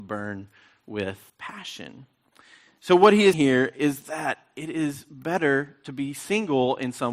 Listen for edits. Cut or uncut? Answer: cut